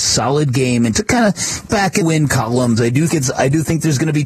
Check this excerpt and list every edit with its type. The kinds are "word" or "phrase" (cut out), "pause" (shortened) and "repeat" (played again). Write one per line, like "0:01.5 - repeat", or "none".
0:00.9 - word
0:01.7 - word
0:02.0 - word
0:02.8 - word
0:03.1 - word